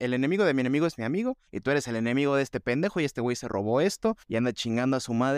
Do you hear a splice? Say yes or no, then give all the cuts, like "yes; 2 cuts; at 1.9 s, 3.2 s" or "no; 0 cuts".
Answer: yes; 2 cuts; at 1.5 s, 4.2 s